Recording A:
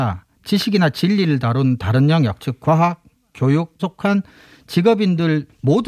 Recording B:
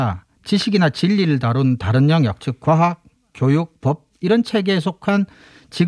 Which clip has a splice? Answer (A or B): A